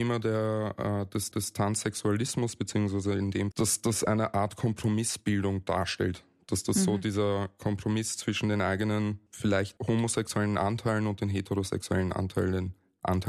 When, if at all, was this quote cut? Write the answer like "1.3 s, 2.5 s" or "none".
1.3 s, 3.5 s